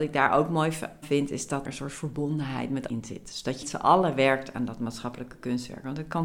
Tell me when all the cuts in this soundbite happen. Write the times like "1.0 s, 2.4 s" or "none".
1.0 s, 1.6 s, 2.9 s, 3.6 s